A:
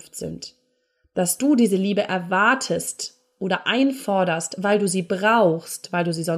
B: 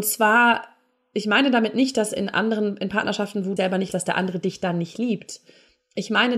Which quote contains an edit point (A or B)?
B